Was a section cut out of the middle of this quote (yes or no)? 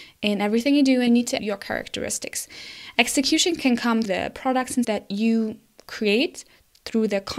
yes